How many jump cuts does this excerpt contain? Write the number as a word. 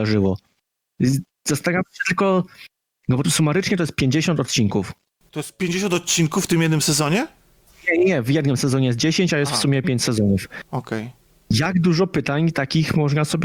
one